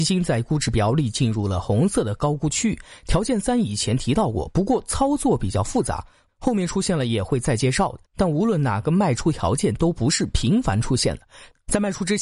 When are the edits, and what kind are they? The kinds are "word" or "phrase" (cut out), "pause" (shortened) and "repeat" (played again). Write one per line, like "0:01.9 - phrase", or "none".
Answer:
0:08.0 - pause